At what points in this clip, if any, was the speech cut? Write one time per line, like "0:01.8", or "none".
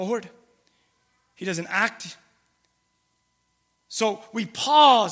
none